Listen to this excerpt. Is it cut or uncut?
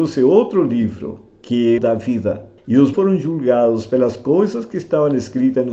cut